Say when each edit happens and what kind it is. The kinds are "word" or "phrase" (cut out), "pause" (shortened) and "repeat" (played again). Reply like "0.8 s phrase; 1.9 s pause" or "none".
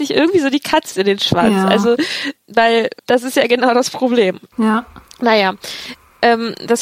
0.9 s word; 3.0 s pause